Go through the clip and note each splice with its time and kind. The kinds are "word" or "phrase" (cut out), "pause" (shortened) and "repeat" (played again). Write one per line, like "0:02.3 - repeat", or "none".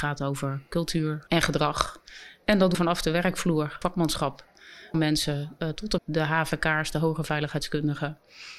0:01.3 - word
0:02.7 - word
0:03.8 - word
0:04.9 - word
0:06.0 - word